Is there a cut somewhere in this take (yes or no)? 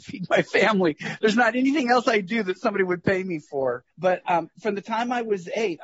yes